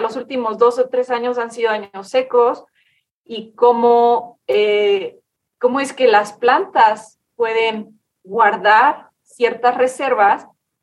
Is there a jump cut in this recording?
no; 0 cuts

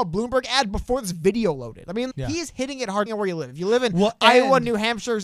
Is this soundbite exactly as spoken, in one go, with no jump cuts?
no; 2 cuts; at 2.1 s, 3.1 s

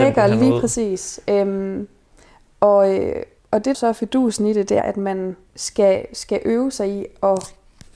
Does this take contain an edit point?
yes; 4 cuts; at 3.4 s, 3.7 s, 4.8 s, 5.5 s

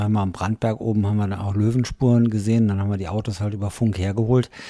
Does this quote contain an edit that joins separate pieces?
no; 0 cuts

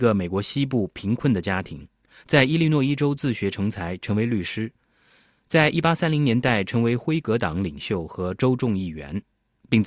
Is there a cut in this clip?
no; 0 cuts

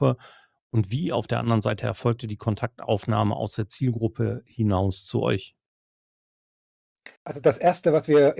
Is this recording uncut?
no; 1 cut; at 7.2 s

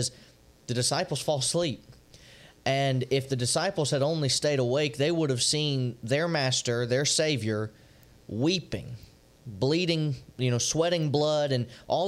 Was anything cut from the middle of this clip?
no; 0 cuts

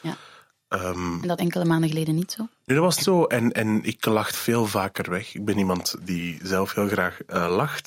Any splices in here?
yes; 4 cuts; at 1.4 s, 3.0 s, 4.3 s, 6.0 s

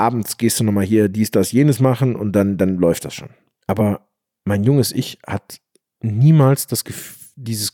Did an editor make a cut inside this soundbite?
no; 0 cuts

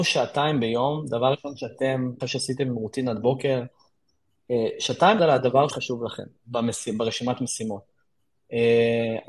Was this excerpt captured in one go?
no; 4 cuts; at 2.2 s, 5.2 s, 5.7 s, 6.4 s

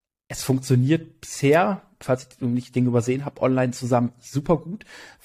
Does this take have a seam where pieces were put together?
no; 0 cuts

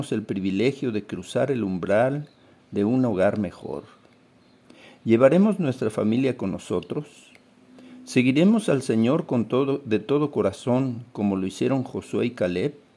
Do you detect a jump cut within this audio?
no; 0 cuts

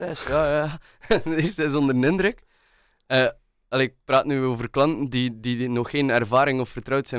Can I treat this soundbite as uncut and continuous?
yes; 0 cuts

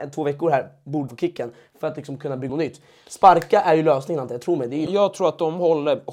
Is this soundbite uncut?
no; 3 cuts; at 1.1 s, 2.5 s, 4.9 s

